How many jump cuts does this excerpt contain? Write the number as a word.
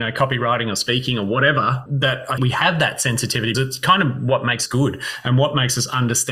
four